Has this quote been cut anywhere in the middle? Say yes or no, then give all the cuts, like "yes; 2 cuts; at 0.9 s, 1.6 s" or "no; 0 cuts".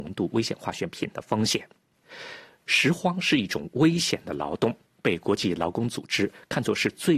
no; 0 cuts